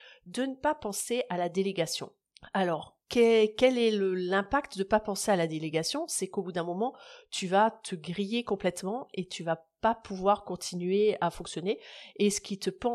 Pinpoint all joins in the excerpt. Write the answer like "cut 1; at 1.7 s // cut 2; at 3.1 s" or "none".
cut 1; at 3.0 s